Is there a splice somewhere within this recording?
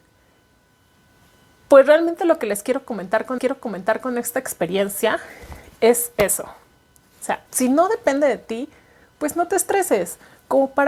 yes; 2 cuts; at 3.4 s, 7.5 s

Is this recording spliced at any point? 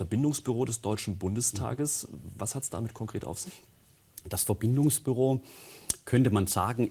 no; 0 cuts

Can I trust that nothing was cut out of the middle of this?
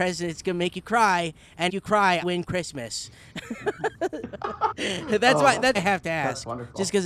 no; 5 cuts; at 1.7 s, 2.2 s, 4.2 s, 4.7 s, 5.7 s

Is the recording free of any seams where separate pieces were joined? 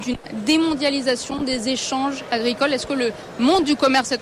yes; 0 cuts

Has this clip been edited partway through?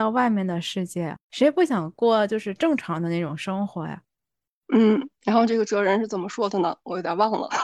yes; 1 cut; at 1.2 s

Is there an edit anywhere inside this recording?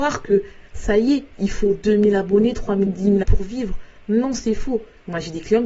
yes; 3 cuts; at 1.3 s, 2.9 s, 3.2 s

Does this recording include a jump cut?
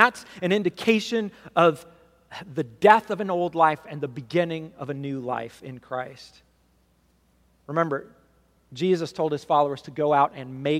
no; 0 cuts

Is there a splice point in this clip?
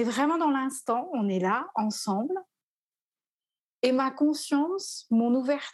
no; 0 cuts

